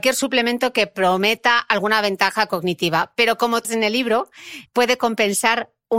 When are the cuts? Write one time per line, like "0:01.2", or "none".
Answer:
0:03.6
0:04.7